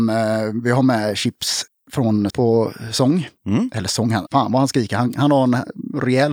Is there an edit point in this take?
yes; 2 cuts; at 2.3 s, 4.3 s

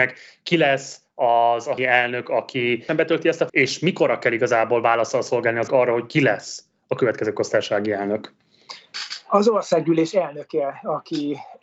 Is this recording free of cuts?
no; 4 cuts; at 1.8 s, 2.9 s, 3.5 s, 5.7 s

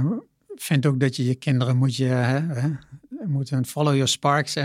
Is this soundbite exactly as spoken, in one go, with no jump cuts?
yes; 0 cuts

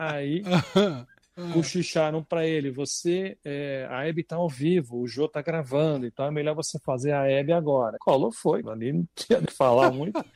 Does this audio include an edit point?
yes; 3 cuts; at 8.0 s, 8.6 s, 9.5 s

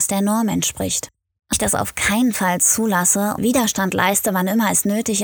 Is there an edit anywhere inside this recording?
yes; 2 cuts; at 1.5 s, 3.4 s

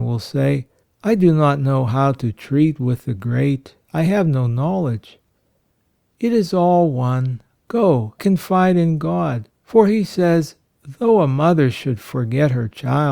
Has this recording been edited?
yes; 2 cuts; at 8.2 s, 9.6 s

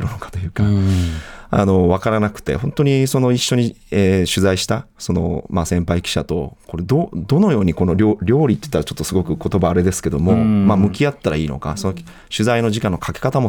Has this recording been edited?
no; 0 cuts

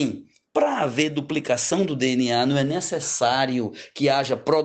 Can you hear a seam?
no; 0 cuts

